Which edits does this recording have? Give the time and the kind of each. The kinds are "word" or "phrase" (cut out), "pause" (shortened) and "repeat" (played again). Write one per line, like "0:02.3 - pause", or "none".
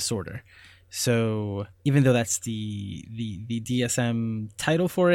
0:01.7 - pause

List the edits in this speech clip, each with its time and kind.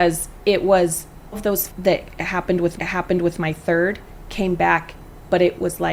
0:01.3 - word
0:01.7 - word
0:02.8 - repeat

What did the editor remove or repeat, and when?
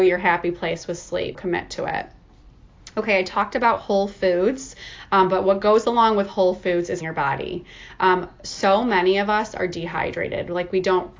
0:01.3 - word
0:07.0 - word

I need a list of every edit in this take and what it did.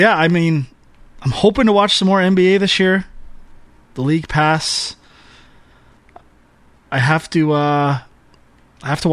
none

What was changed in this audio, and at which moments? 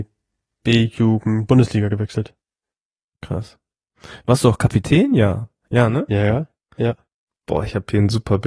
none

